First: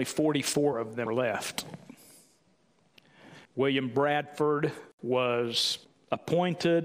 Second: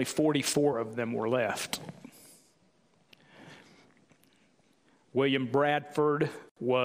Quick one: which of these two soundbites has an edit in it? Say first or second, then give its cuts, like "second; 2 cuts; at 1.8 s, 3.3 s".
first; 3 cuts; at 1.1 s, 3.4 s, 5.8 s